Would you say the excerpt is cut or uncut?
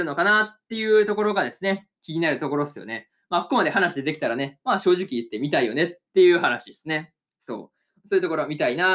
uncut